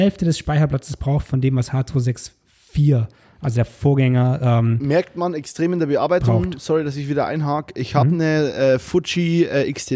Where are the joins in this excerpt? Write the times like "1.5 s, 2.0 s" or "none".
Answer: none